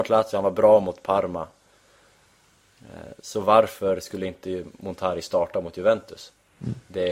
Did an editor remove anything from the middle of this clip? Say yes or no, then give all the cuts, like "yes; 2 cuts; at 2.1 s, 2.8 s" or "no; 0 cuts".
no; 0 cuts